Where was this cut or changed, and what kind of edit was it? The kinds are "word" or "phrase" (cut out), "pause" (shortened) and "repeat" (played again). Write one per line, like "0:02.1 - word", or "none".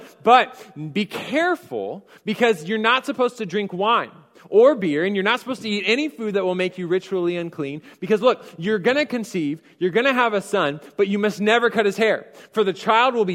none